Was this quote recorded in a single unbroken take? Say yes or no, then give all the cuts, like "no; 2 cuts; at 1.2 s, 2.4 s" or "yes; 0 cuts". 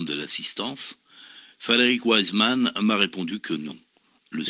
yes; 0 cuts